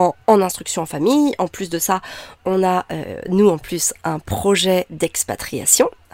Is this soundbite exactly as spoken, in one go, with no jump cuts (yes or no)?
yes